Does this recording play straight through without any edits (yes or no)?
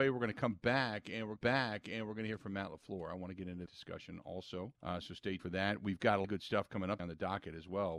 no